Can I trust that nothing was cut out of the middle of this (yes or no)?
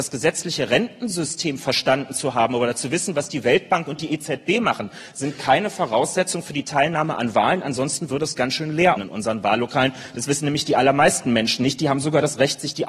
no